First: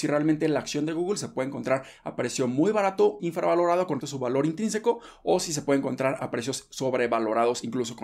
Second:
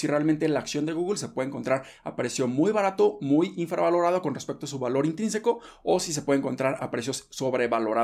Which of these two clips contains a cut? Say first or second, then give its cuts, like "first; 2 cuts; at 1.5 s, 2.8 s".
first; 2 cuts; at 3.2 s, 4.0 s